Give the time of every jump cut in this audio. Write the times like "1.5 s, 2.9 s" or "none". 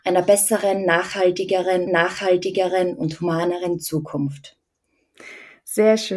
1.9 s